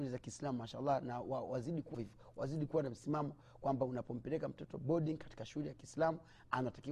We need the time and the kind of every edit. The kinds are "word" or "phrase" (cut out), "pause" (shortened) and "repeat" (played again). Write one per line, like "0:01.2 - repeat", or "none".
0:01.9 - word